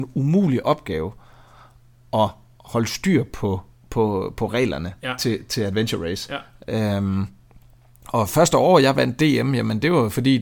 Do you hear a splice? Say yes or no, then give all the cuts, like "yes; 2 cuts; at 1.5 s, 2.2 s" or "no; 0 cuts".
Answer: no; 0 cuts